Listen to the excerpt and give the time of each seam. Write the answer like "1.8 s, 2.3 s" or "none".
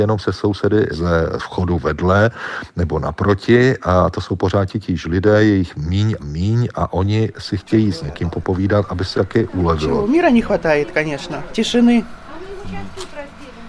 6.2 s, 9.2 s